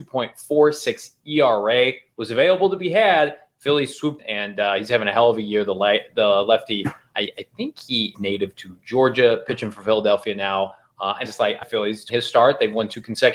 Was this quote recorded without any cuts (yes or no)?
no